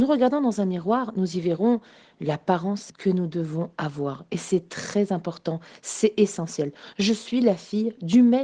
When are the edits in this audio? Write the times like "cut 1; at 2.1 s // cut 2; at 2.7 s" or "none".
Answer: cut 1; at 2.9 s